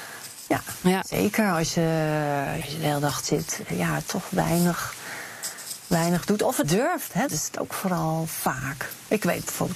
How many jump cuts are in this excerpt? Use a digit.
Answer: 5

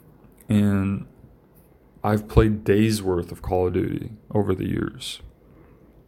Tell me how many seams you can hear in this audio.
0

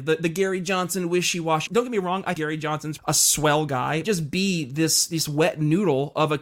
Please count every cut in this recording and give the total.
4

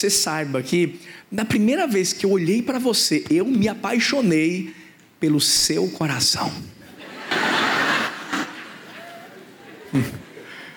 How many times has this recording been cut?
0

